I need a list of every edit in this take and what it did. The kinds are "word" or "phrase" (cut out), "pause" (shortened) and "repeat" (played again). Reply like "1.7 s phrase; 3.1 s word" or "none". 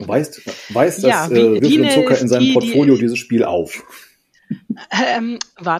1.6 s word